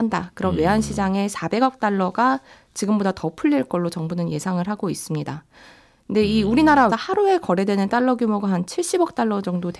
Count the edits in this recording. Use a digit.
1